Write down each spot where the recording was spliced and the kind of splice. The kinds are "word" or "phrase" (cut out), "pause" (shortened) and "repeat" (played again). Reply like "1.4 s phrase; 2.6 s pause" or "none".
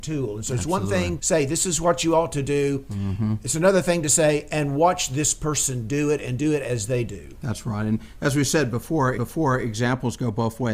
1.2 s word; 9.2 s repeat